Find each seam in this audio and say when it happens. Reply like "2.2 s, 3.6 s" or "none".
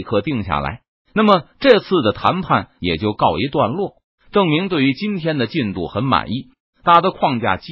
none